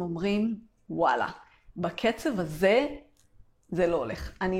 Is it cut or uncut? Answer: uncut